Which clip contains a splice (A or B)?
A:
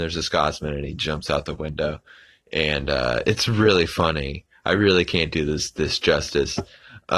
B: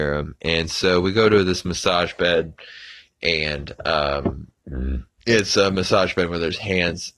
B